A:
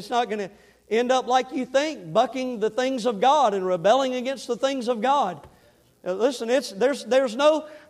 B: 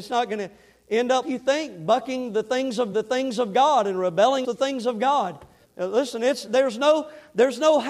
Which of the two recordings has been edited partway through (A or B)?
B